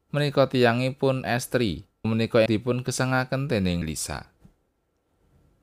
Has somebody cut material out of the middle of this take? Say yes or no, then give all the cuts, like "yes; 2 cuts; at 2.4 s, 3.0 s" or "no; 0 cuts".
yes; 3 cuts; at 2.0 s, 2.5 s, 3.8 s